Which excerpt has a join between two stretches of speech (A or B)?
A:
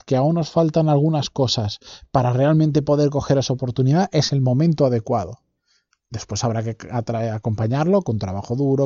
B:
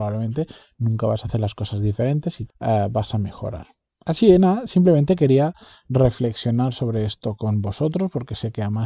B